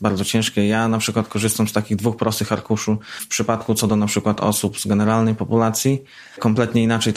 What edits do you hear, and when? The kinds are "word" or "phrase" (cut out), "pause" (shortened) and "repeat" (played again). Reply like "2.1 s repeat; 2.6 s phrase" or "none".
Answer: none